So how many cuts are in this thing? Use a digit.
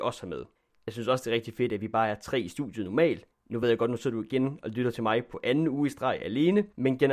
0